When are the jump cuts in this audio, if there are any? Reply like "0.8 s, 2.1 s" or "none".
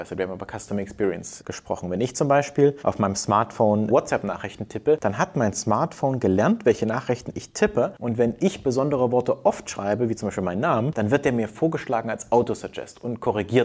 none